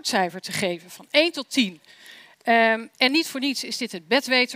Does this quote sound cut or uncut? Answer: uncut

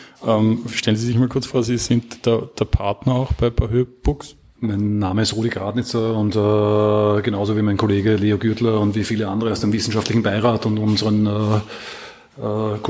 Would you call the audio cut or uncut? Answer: uncut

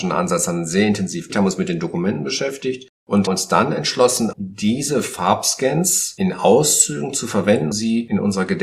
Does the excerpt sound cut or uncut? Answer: cut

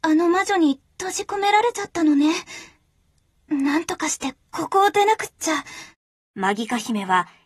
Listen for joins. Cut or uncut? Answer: uncut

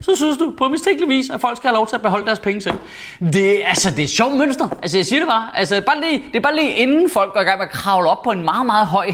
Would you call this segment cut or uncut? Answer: uncut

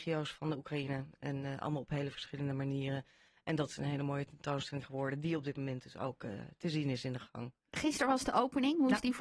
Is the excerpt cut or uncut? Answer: uncut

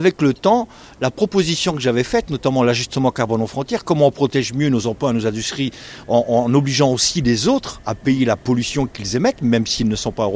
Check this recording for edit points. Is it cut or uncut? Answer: uncut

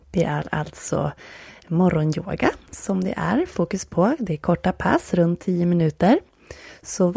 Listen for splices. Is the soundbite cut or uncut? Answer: uncut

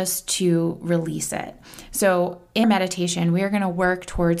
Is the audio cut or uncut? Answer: cut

